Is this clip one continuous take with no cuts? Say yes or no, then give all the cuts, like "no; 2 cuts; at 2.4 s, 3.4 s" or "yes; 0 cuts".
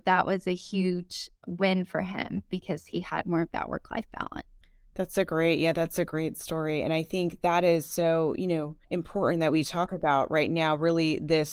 no; 2 cuts; at 4.6 s, 8.8 s